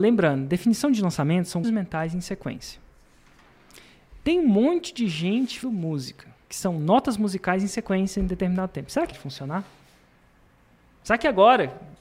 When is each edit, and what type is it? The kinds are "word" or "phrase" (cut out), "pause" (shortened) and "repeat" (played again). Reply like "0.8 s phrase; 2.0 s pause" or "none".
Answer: 1.6 s word; 5.6 s word; 6.4 s pause; 9.1 s phrase